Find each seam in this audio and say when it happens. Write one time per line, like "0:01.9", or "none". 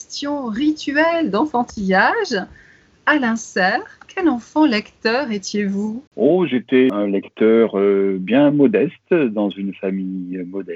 0:06.1